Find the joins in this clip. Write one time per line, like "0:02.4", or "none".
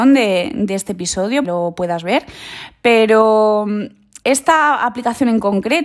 0:01.4
0:04.2